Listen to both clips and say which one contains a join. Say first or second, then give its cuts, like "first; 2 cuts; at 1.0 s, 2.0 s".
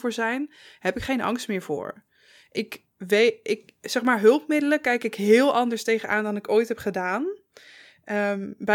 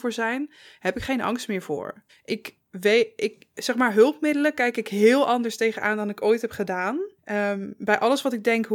second; 2 cuts; at 2.1 s, 7.2 s